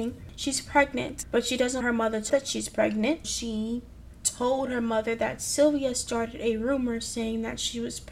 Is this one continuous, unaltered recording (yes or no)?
no